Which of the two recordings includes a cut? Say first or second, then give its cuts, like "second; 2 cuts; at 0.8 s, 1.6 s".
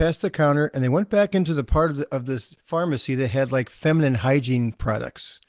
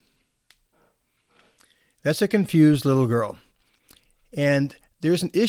first; 1 cut; at 2.6 s